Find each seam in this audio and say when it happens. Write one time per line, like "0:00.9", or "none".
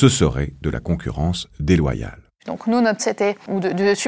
0:02.3
0:03.0